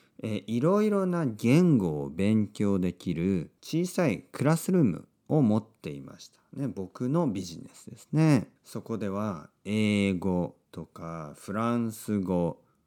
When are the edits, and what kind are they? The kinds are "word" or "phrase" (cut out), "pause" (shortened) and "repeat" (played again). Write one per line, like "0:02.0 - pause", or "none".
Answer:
0:03.6 - pause
0:08.6 - pause
0:10.6 - pause